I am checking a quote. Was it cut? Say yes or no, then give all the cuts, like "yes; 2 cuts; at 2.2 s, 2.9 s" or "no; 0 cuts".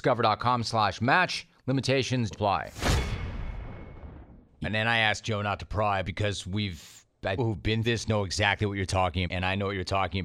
yes; 6 cuts; at 2.3 s, 4.6 s, 6.0 s, 7.4 s, 7.8 s, 9.3 s